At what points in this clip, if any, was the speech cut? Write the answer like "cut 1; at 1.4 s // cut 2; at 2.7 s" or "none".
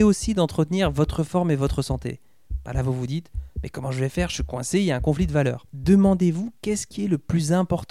none

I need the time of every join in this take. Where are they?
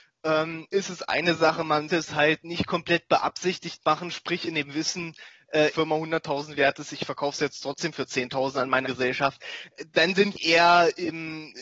cut 1; at 1.9 s // cut 2; at 2.4 s // cut 3; at 5.7 s // cut 4; at 8.8 s // cut 5; at 10.3 s

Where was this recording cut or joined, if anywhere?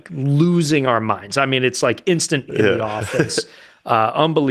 cut 1; at 2.5 s

